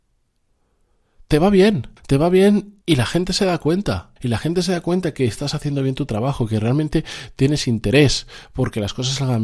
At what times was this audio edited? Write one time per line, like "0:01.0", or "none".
0:02.0
0:02.8
0:04.2